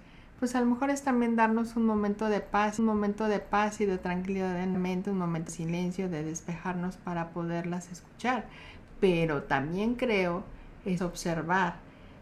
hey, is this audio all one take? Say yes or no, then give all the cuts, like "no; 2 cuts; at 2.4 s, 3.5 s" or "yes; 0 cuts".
no; 4 cuts; at 2.8 s, 4.7 s, 5.5 s, 11.0 s